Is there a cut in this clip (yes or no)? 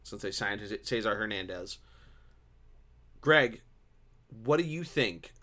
no